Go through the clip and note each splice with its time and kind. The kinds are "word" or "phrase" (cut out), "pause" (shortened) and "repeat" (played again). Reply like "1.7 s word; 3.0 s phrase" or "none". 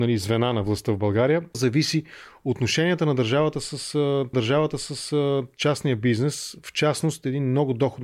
1.5 s word; 4.3 s repeat